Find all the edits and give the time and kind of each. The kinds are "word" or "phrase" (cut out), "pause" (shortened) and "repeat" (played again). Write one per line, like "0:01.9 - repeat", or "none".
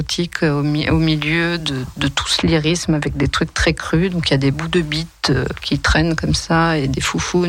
none